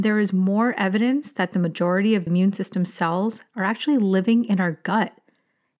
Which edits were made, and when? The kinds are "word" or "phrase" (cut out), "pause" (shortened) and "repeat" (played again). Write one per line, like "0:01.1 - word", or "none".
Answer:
0:02.3 - word